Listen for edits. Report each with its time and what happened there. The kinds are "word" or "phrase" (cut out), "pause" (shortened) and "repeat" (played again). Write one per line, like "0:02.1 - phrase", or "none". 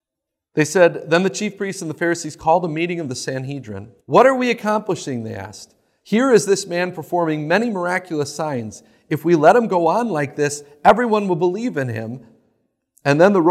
0:04.0 - pause